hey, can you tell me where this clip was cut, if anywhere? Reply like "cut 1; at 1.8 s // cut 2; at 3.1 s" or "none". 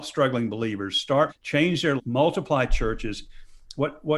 cut 1; at 1.3 s // cut 2; at 2.0 s